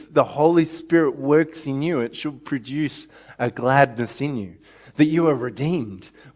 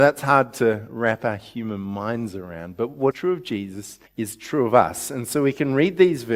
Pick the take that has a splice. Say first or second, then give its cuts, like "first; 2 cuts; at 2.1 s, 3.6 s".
second; 2 cuts; at 3.1 s, 4.1 s